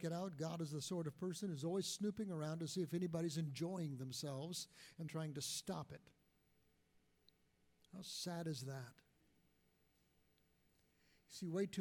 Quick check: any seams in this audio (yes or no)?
yes